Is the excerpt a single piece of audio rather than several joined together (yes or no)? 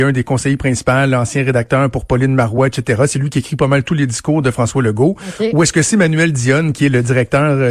yes